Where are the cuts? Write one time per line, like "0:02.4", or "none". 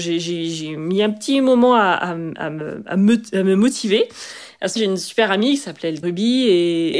0:04.8
0:06.0